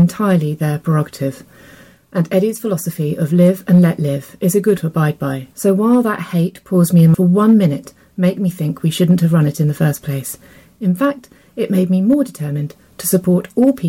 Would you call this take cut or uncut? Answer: cut